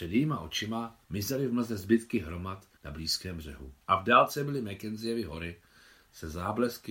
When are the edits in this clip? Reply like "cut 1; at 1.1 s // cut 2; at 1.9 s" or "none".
cut 1; at 1.0 s // cut 2; at 2.8 s // cut 3; at 3.8 s